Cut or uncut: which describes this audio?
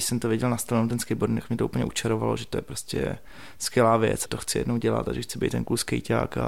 cut